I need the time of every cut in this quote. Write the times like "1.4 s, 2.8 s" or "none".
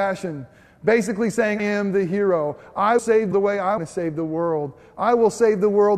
1.6 s, 3.0 s, 3.3 s, 3.8 s